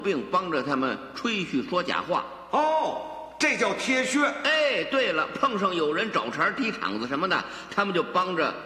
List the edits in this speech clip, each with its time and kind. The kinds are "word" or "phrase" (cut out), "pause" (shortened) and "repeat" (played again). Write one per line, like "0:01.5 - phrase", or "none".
none